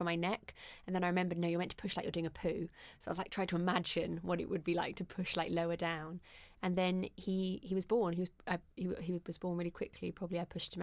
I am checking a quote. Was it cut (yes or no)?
no